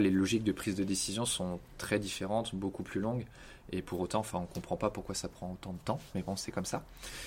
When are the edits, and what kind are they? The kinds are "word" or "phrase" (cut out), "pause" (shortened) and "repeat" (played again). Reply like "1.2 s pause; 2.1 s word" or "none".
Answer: none